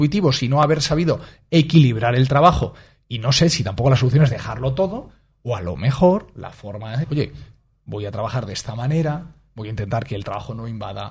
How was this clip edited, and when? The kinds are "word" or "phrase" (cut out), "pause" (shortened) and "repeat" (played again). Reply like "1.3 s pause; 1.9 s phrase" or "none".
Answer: 7.0 s word